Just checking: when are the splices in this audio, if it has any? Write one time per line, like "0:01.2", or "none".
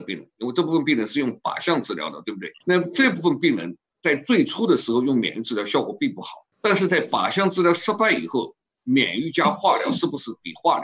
0:02.6
0:06.5